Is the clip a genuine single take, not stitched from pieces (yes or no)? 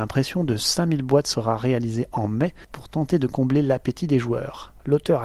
yes